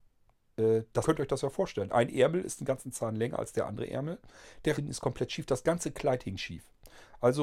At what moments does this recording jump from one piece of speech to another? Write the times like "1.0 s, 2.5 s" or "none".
1.0 s, 4.7 s